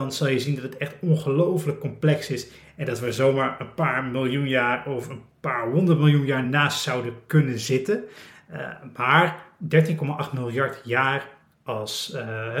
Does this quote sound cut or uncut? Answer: uncut